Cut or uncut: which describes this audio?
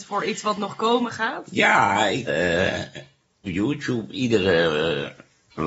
cut